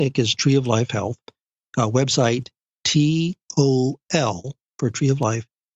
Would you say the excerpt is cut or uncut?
cut